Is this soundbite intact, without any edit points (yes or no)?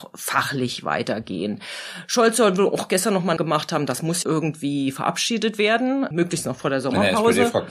no